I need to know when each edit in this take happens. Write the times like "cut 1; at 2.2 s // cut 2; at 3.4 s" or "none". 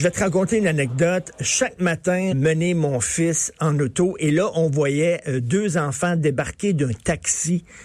cut 1; at 2.3 s